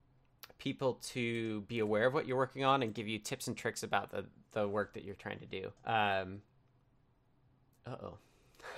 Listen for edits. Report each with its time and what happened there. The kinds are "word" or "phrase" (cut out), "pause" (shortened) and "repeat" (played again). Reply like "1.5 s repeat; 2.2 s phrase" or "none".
5.8 s pause